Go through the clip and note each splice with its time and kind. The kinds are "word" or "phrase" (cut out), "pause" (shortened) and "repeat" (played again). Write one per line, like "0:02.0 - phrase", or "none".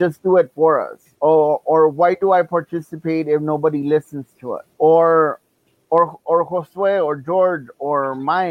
0:01.1 - pause
0:04.7 - pause